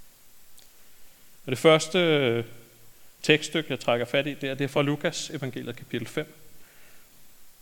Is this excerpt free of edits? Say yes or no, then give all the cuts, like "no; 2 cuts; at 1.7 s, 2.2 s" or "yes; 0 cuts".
yes; 0 cuts